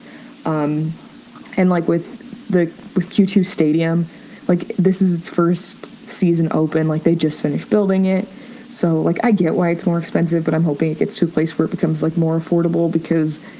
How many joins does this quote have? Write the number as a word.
zero